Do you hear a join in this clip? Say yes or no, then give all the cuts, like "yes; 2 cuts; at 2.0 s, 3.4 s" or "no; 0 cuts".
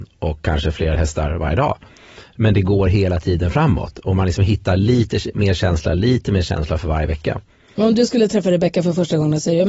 no; 0 cuts